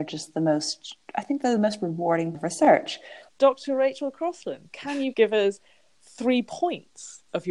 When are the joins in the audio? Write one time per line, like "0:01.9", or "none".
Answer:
0:02.3
0:03.3
0:05.1